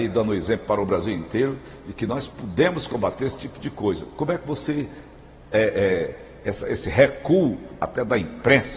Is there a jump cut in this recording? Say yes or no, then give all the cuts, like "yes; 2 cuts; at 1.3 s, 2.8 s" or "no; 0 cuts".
no; 0 cuts